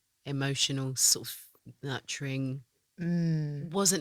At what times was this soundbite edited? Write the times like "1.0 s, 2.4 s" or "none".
2.9 s